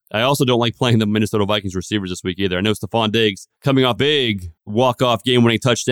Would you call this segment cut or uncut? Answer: cut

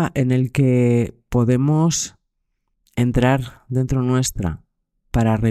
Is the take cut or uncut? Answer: uncut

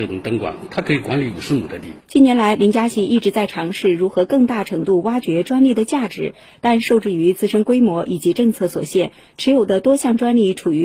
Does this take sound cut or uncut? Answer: uncut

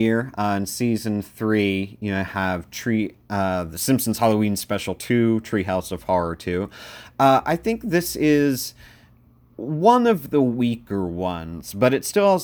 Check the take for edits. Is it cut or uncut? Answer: uncut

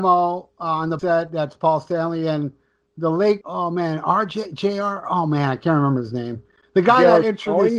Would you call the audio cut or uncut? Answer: cut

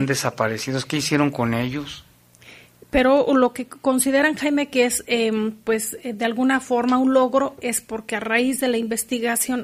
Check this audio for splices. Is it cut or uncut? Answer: uncut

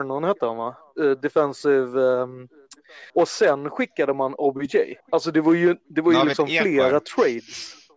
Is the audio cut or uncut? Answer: cut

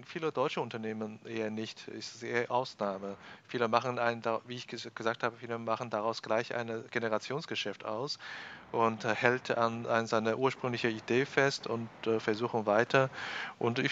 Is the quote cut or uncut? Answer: uncut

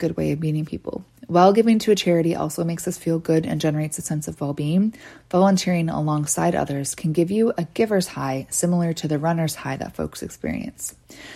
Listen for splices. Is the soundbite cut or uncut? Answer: uncut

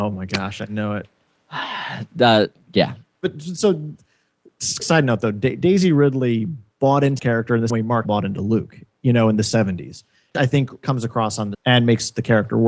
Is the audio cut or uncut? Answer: cut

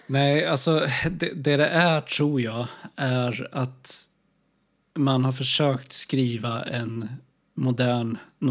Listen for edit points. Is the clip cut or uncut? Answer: uncut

